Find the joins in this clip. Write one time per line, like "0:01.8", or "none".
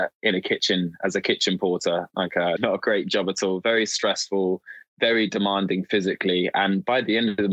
0:02.6